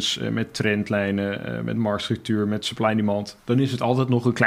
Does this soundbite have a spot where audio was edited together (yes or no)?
no